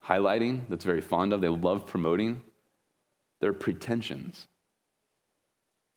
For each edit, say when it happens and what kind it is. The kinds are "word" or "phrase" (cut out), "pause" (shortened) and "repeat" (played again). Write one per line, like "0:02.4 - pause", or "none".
none

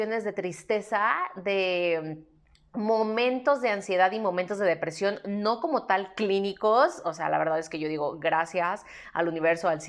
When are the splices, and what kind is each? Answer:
none

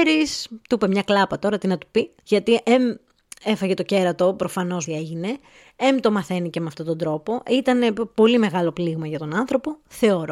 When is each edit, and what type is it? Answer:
0:02.2 - pause
0:04.9 - phrase

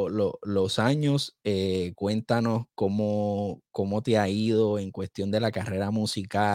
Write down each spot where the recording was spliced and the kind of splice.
none

